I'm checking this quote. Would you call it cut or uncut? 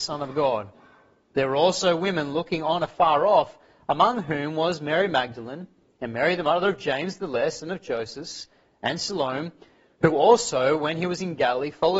uncut